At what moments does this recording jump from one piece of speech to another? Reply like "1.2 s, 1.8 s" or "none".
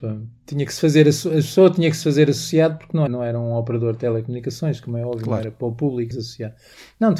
3.1 s, 6.1 s